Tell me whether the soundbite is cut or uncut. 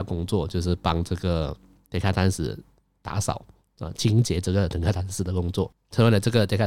uncut